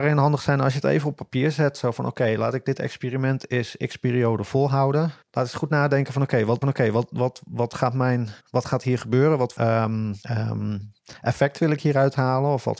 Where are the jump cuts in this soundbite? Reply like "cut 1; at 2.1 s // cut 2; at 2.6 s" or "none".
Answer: cut 1; at 5.2 s // cut 2; at 6.6 s // cut 3; at 8.4 s // cut 4; at 9.6 s // cut 5; at 10.2 s